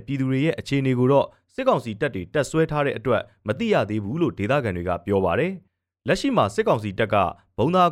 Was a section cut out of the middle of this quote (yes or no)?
yes